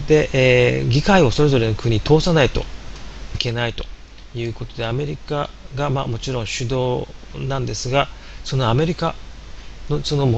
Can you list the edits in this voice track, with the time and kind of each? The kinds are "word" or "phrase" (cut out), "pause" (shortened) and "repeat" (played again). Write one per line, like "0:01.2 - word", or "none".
0:03.3 - phrase